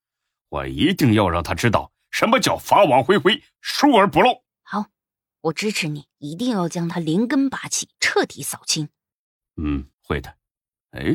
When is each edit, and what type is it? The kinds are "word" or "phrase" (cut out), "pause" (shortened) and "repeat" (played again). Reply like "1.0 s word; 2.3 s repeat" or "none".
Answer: 4.5 s pause; 6.1 s pause; 7.9 s pause; 9.9 s pause